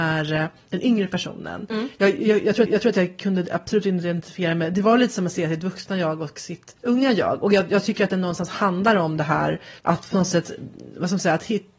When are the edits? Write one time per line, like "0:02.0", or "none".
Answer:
0:02.7
0:06.8
0:09.8